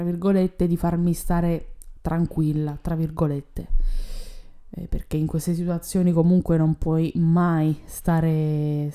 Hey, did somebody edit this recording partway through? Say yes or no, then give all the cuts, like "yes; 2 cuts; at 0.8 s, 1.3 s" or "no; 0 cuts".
no; 0 cuts